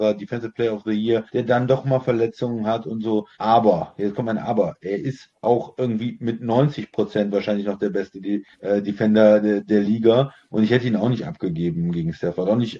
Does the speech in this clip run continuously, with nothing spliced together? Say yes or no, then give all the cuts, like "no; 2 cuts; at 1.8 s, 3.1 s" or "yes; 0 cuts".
no; 3 cuts; at 1.3 s, 3.3 s, 8.5 s